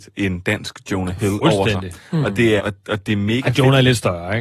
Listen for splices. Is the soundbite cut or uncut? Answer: cut